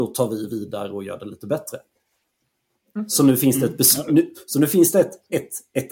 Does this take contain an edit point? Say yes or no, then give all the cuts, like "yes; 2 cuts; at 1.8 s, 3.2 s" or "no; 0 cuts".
no; 0 cuts